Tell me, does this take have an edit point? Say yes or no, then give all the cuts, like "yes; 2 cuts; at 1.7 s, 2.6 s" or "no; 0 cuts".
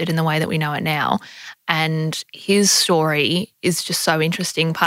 no; 0 cuts